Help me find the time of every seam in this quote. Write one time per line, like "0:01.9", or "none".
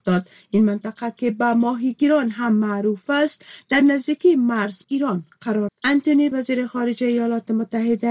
0:04.8
0:05.7
0:06.3